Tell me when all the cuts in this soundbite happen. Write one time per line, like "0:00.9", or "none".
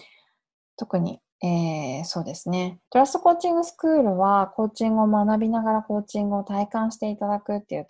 0:01.3
0:02.9

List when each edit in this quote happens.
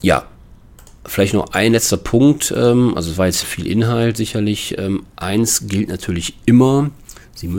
0:03.4

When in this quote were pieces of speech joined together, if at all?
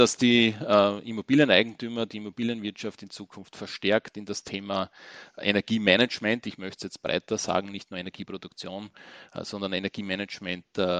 none

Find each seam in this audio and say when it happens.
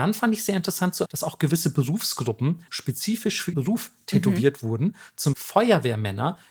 0:01.1
0:02.7
0:03.5
0:05.3

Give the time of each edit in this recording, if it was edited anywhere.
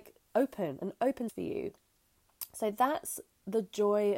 0:01.3

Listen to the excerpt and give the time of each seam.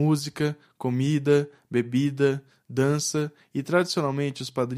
none

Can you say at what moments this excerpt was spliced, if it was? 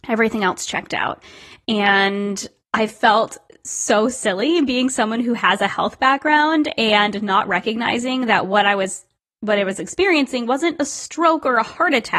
none

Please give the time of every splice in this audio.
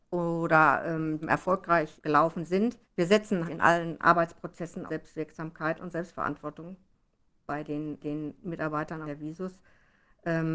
0:01.2
0:02.0
0:02.8
0:03.5
0:04.9
0:08.0
0:09.0

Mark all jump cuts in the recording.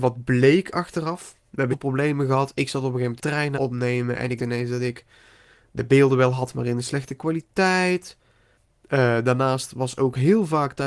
0:01.7
0:03.2
0:03.5
0:04.4

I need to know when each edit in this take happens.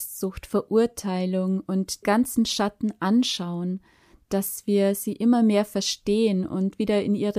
0:02.0

